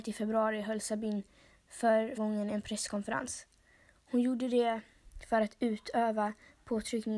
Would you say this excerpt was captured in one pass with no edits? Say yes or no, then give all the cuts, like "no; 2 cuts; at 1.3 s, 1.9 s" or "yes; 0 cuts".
no; 1 cut; at 2.2 s